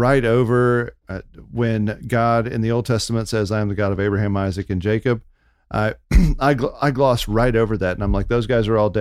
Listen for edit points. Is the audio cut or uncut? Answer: uncut